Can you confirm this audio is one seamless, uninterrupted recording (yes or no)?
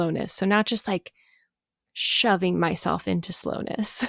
yes